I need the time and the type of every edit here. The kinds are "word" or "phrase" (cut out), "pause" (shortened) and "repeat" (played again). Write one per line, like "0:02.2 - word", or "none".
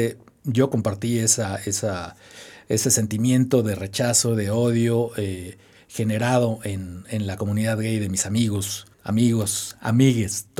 0:08.9 - pause